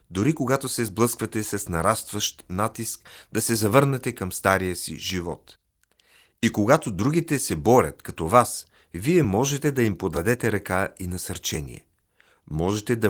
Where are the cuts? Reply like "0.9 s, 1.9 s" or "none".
none